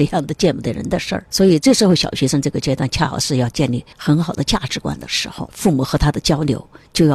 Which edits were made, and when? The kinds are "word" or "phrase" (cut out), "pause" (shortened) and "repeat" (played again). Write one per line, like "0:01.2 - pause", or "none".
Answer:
0:03.9 - pause